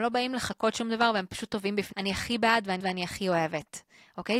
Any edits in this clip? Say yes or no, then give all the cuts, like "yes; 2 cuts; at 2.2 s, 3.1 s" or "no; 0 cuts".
yes; 2 cuts; at 1.9 s, 2.8 s